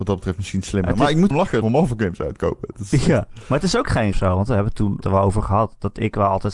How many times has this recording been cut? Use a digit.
4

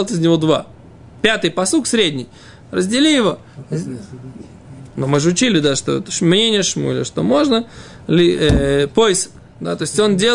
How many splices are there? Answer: 0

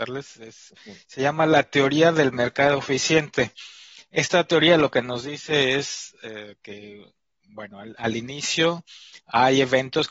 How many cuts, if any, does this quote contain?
0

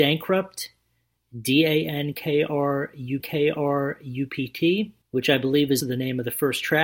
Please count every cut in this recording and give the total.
3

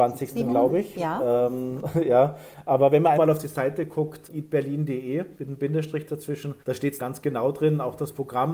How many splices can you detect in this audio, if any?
4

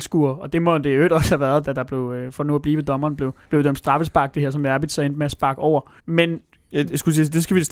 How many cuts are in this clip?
3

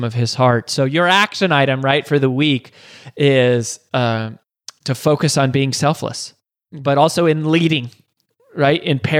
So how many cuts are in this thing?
0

